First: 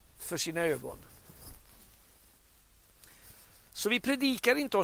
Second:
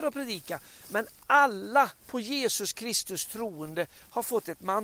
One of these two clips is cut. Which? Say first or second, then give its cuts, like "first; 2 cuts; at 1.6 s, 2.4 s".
second; 1 cut; at 2.0 s